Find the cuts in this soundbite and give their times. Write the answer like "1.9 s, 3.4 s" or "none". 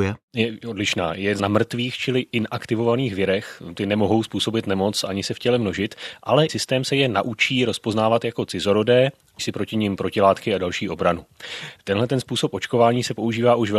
1.4 s, 6.5 s, 9.4 s